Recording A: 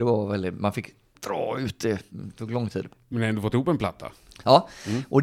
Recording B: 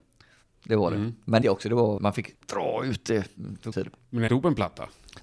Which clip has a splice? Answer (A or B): B